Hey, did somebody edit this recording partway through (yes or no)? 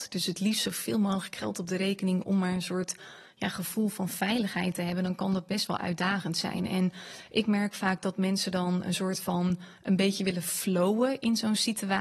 no